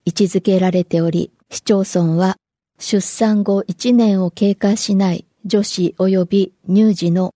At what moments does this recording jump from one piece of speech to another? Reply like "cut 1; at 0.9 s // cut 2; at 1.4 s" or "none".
cut 1; at 1.4 s // cut 2; at 5.3 s